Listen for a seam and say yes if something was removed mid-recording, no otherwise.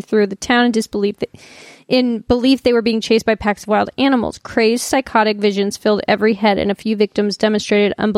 no